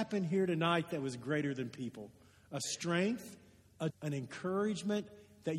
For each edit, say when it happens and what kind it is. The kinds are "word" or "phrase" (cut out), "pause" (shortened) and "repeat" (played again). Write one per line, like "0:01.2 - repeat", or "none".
0:03.9 - word